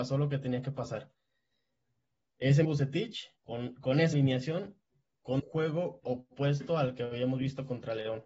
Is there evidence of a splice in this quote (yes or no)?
yes